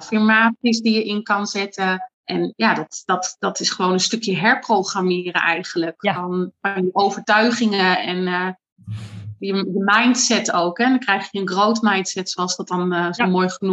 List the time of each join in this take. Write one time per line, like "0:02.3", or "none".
0:02.1